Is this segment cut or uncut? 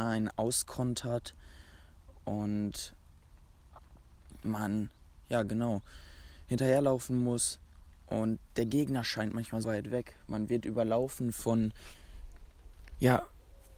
cut